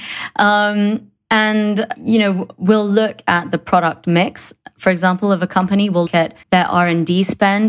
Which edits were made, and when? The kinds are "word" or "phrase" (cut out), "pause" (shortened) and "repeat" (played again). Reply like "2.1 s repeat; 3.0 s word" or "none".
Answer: 1.9 s word; 6.1 s word; 6.4 s pause